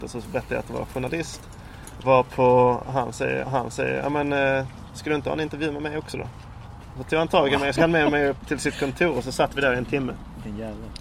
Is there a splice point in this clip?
yes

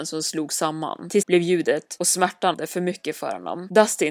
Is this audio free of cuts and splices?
no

